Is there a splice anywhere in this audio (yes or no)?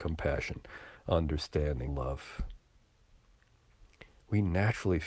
yes